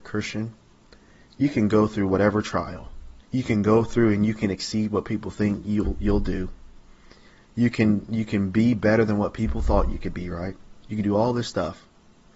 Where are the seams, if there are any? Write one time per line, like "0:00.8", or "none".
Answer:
0:03.2